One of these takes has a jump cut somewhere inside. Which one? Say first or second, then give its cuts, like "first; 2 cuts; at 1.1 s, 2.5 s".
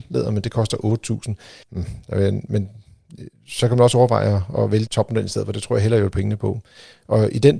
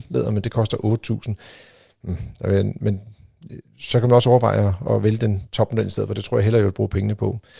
first; 3 cuts; at 1.6 s, 4.9 s, 6.1 s